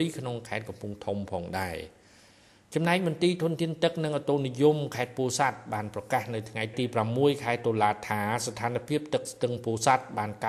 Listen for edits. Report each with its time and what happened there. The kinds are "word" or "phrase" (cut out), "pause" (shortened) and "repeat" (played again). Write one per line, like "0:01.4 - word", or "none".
none